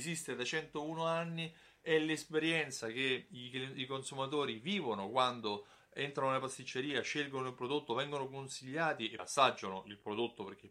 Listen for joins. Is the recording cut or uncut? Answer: cut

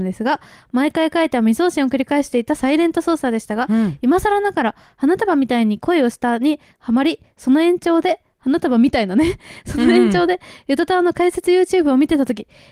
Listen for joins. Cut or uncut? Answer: uncut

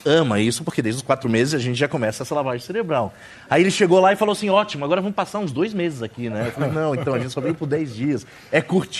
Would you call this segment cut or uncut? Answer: uncut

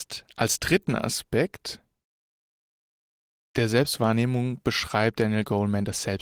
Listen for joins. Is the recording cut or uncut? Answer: uncut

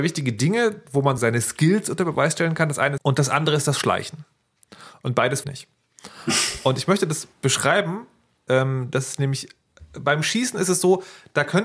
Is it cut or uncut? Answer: cut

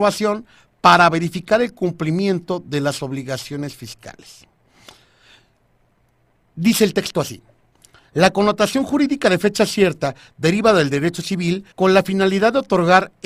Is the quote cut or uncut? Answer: cut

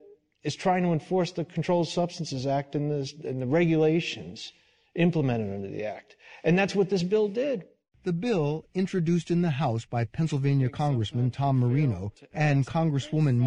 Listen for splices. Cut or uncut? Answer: uncut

